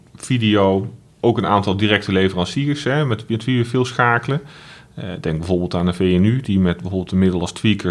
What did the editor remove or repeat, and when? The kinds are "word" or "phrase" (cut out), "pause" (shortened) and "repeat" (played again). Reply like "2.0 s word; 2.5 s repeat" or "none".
none